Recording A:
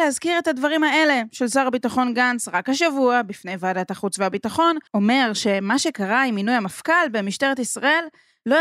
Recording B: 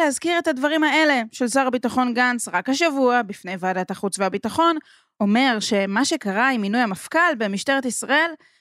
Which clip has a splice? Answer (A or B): A